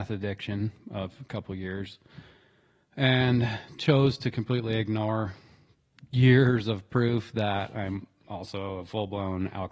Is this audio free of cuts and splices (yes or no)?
yes